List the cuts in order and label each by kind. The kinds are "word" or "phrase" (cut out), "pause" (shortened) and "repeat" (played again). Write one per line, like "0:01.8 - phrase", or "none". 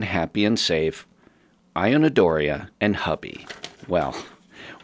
0:02.7 - pause
0:03.8 - pause